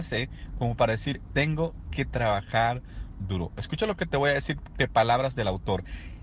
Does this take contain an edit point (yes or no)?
yes